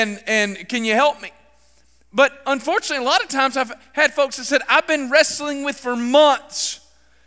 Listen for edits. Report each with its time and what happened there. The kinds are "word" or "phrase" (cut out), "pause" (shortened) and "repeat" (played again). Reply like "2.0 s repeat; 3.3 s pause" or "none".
5.8 s word